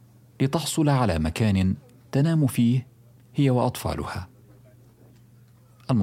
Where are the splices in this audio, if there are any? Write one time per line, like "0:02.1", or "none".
none

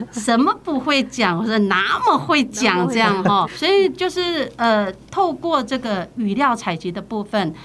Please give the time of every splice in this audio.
0:03.5

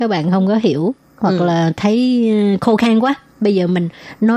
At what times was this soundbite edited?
none

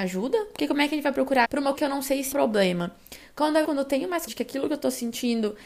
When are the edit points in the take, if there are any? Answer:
0:01.4
0:01.7
0:02.3
0:03.6
0:04.3

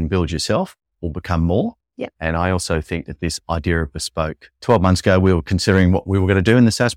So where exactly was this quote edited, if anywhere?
0:02.1
0:04.6

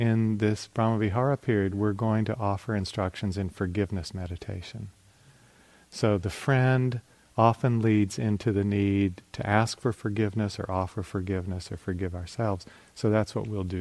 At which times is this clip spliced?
none

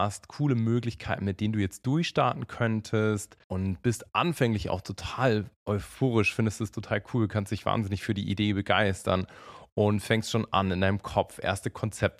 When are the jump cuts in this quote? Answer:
0:03.4

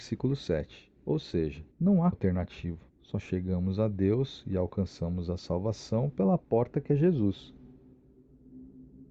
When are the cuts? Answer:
0:01.7
0:02.1
0:02.9

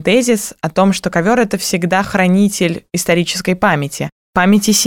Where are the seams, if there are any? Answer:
none

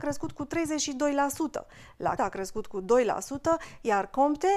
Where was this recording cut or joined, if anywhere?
0:02.2

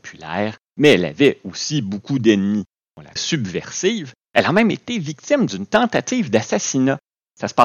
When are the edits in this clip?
0:03.2

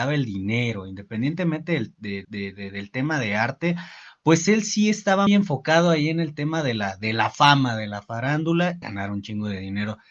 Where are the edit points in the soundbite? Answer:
0:02.2
0:05.3
0:08.8

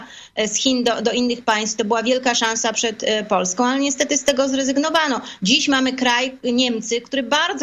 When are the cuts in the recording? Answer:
none

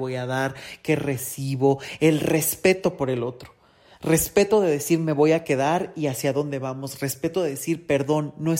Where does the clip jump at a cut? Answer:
none

